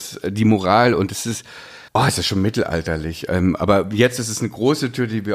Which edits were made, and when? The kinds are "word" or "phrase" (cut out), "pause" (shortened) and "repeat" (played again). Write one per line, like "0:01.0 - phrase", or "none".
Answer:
0:01.9 - pause